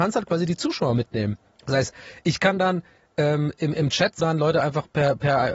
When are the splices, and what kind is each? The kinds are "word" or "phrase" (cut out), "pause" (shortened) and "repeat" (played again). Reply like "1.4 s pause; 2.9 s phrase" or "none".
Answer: 1.5 s pause; 4.2 s phrase